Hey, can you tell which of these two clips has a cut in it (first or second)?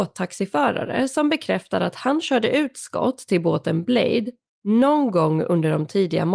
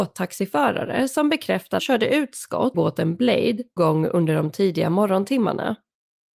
second